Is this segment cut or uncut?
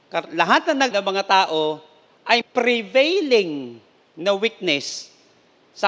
cut